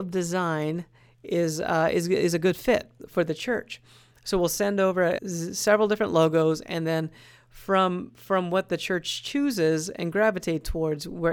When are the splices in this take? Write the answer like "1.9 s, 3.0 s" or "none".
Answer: 5.2 s